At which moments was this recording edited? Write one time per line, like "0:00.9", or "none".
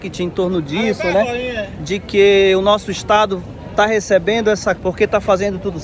0:04.8